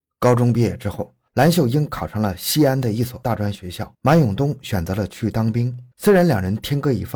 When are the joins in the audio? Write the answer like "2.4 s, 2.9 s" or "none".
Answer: 3.9 s, 5.9 s

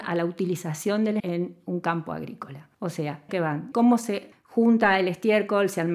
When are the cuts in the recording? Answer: 1.2 s, 2.7 s, 3.3 s, 3.7 s, 4.3 s

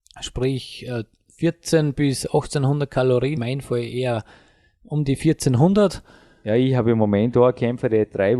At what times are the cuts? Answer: 3.4 s

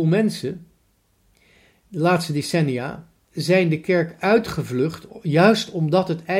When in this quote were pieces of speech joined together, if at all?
none

